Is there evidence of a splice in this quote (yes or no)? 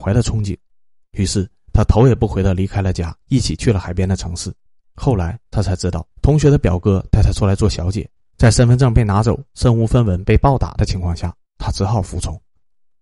yes